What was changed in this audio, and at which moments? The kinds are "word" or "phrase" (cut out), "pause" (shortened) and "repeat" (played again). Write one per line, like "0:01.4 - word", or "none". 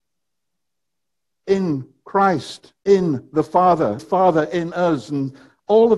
0:02.8 - pause
0:04.0 - phrase